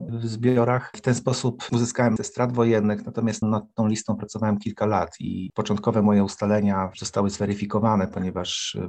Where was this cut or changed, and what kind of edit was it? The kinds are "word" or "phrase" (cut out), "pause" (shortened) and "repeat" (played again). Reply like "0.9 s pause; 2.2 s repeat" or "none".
2.2 s word